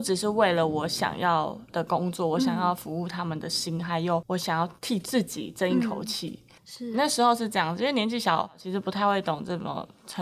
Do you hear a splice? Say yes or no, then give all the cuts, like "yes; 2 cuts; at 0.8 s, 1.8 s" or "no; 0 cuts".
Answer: yes; 3 cuts; at 4.8 s, 6.6 s, 6.9 s